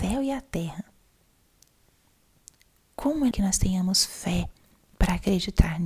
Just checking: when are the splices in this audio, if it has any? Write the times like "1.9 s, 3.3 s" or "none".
3.3 s